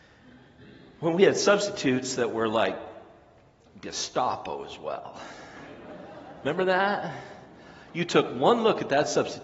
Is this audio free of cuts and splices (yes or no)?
yes